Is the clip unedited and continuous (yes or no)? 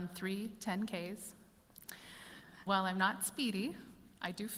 no